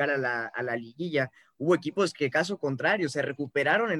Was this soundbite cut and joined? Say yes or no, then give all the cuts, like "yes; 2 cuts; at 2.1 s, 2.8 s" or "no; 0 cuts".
no; 0 cuts